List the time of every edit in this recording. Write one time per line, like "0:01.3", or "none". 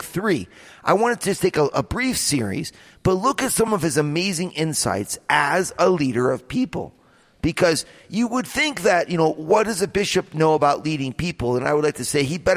none